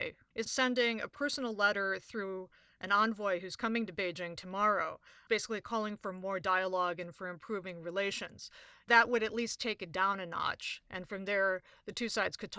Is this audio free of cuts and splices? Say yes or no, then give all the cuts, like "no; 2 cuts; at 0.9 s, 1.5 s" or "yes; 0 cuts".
yes; 0 cuts